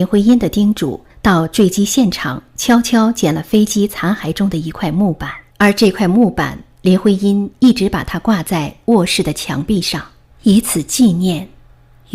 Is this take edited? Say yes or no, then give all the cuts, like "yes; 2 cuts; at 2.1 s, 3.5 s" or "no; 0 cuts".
yes; 3 cuts; at 1.1 s, 5.5 s, 10.3 s